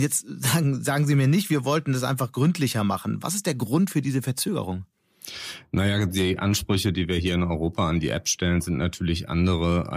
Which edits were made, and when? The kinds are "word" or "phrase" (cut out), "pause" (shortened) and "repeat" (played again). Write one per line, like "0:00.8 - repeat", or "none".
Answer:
none

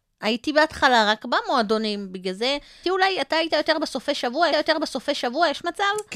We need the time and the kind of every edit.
0:02.8 - word
0:04.5 - repeat

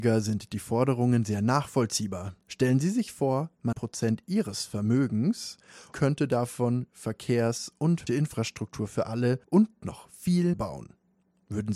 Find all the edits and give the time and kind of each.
0:02.4 - pause
0:03.7 - word
0:05.9 - word
0:06.9 - word
0:08.1 - word
0:09.4 - pause
0:10.5 - word

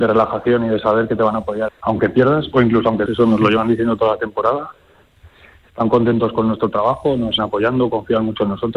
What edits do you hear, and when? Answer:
0:01.7 - word
0:03.1 - word
0:07.4 - word

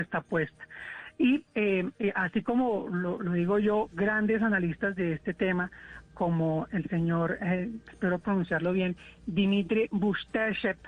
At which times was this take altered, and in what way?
0:01.5 - pause
0:03.2 - word

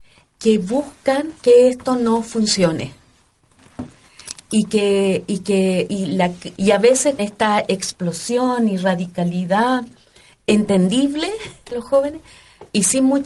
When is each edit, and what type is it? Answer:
0:05.9 - word
0:06.6 - word
0:07.2 - word
0:11.7 - word

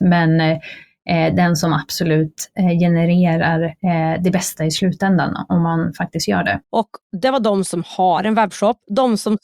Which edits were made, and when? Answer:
0:06.6 - pause

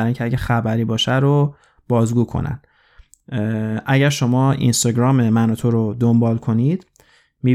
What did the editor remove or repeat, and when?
none

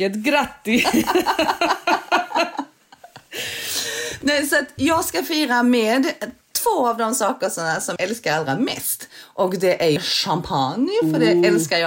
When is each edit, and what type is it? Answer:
0:04.8 - word
0:08.0 - word
0:10.0 - word

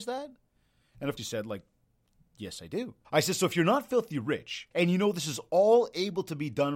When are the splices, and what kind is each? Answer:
0:01.2 - word
0:03.0 - pause
0:04.7 - pause

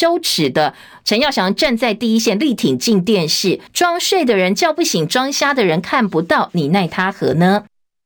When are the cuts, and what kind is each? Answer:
0:03.7 - pause

